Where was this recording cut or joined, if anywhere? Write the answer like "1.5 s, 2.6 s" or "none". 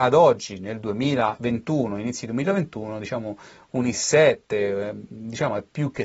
none